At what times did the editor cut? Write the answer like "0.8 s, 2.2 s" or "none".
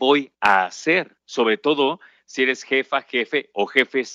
1.2 s